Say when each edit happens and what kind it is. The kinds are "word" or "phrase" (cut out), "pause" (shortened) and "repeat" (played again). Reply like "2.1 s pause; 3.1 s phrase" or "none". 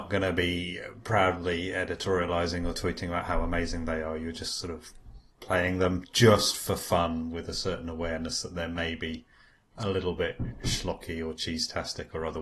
none